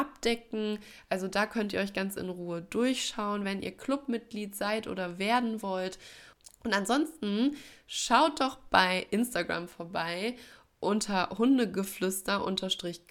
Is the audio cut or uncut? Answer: uncut